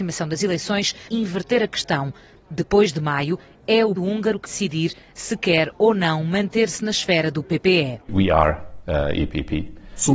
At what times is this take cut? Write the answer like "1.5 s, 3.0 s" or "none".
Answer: 1.1 s, 4.0 s, 4.4 s